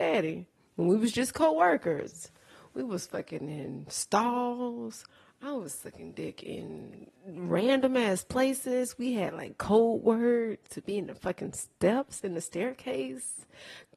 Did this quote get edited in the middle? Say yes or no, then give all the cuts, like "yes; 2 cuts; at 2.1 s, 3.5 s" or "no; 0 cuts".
yes; 1 cut; at 7.2 s